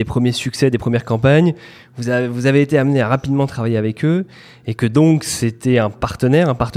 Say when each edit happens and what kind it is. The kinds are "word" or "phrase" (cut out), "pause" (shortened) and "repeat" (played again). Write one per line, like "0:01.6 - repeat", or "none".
none

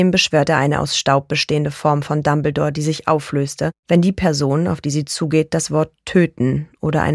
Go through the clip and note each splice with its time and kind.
0:03.8 - pause

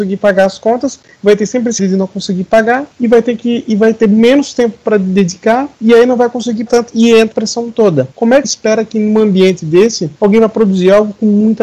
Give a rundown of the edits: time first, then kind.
0:01.8 - word
0:02.9 - pause
0:05.7 - pause
0:06.7 - word
0:07.3 - word
0:08.1 - pause
0:08.4 - word
0:10.2 - pause

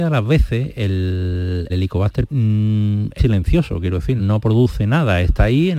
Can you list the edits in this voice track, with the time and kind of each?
0:01.7 - word
0:02.3 - word
0:03.2 - word
0:04.2 - word

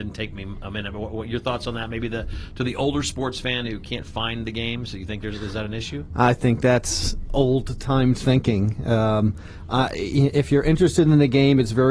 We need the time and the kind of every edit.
none

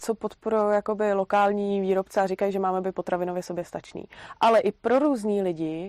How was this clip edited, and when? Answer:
none

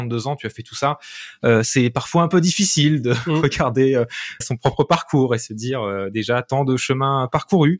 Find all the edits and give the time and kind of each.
0:04.4 - word

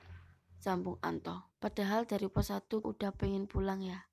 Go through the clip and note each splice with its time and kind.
0:01.5 - pause
0:02.8 - word

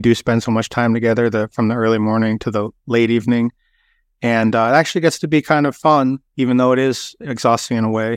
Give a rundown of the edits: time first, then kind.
0:06.3 - pause

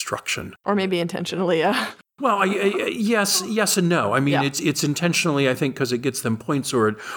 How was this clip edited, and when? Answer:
none

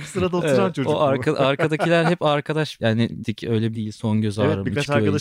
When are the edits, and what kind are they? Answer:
0:02.8 - phrase
0:03.2 - word
0:03.7 - word

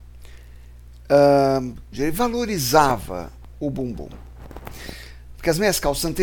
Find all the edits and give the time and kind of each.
0:01.9 - word

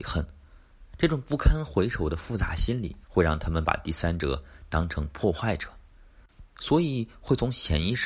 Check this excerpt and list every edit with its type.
0:03.0 - pause

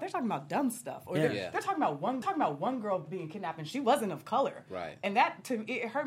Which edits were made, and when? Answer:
0:02.2 - repeat

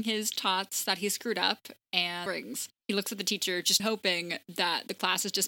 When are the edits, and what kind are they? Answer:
0:02.3 - phrase
0:02.8 - pause
0:03.8 - word

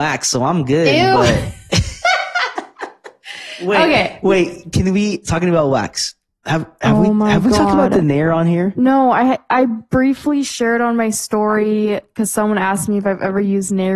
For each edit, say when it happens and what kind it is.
none

